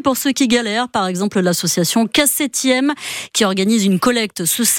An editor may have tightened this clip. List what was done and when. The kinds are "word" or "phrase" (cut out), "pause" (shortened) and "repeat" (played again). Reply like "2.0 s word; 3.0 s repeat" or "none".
none